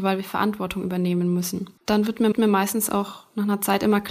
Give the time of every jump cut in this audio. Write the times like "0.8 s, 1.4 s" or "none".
1.8 s, 2.3 s